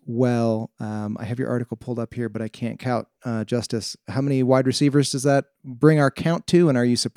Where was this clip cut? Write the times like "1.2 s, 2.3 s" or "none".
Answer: none

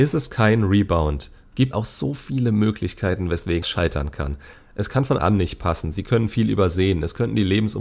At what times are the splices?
1.7 s, 3.6 s, 5.2 s

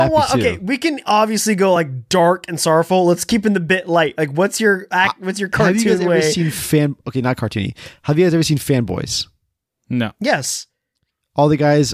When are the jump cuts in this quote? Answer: none

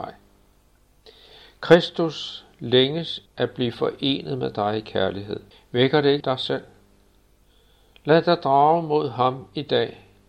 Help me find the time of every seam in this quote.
3.3 s, 5.5 s, 6.2 s

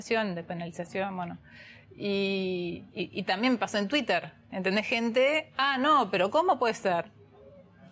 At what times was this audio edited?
none

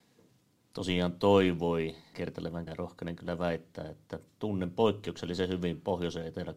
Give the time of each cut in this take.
2.1 s, 2.7 s

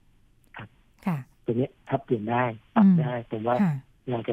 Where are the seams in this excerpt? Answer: 1.3 s

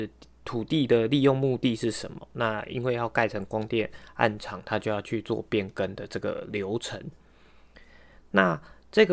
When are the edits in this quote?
none

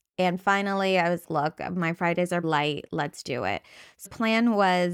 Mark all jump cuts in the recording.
1.2 s, 2.4 s, 3.2 s, 4.0 s

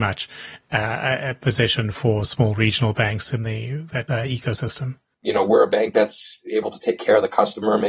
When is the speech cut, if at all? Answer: 4.1 s

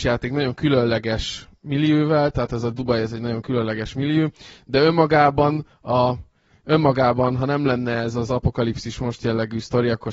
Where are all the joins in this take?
none

